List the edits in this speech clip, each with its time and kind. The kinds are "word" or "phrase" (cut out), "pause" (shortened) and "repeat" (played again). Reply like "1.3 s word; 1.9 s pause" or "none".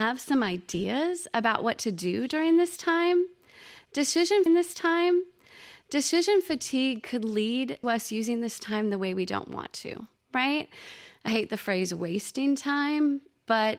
4.5 s repeat; 7.8 s word; 11.3 s word

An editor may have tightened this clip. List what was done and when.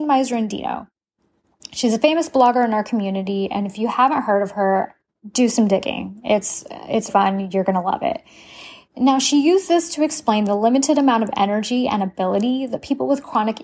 7.1 s word

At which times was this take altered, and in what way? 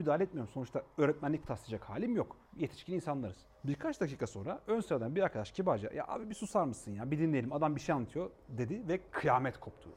2.4 s pause; 3.5 s pause

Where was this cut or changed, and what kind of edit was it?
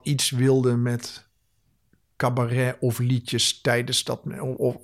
none

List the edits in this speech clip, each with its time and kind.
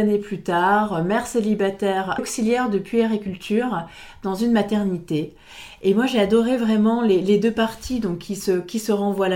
2.2 s phrase

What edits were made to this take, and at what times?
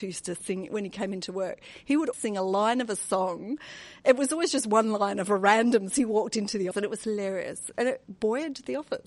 2.1 s word; 5.9 s phrase; 6.7 s word; 8.0 s word

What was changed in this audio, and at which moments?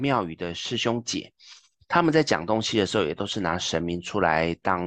none

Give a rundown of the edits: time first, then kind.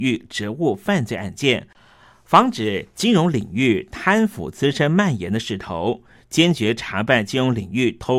none

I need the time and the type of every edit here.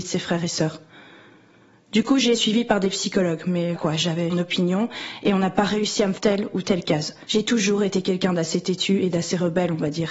2.3 s word; 3.7 s word; 4.3 s word; 6.2 s phrase

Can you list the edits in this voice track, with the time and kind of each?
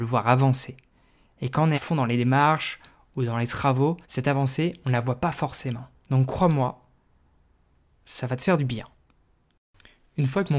1.7 s word; 4.0 s pause; 6.0 s pause

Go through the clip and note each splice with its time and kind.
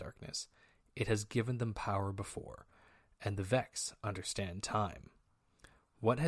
none

